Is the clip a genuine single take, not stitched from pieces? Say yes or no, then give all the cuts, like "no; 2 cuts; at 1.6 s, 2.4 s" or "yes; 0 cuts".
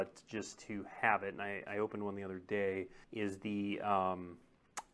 no; 1 cut; at 3.0 s